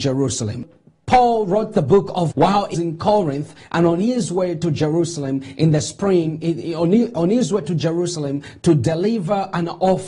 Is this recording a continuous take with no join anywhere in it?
no; 2 cuts; at 2.3 s, 2.7 s

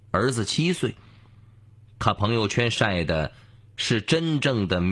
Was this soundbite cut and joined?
no; 0 cuts

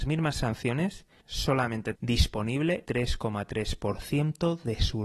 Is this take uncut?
no; 3 cuts; at 1.2 s, 1.9 s, 2.9 s

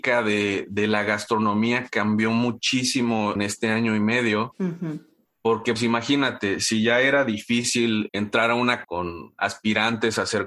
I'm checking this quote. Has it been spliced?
yes; 4 cuts; at 3.4 s, 5.8 s, 8.1 s, 8.8 s

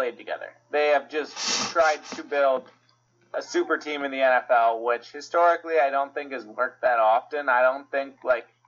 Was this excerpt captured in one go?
yes; 0 cuts

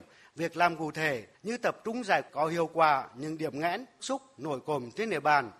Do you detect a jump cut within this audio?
yes; 3 cuts; at 1.3 s, 2.3 s, 4.0 s

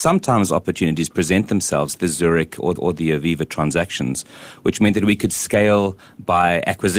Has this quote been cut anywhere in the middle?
yes; 2 cuts; at 1.9 s, 2.8 s

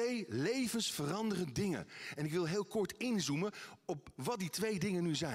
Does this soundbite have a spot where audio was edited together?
no; 0 cuts

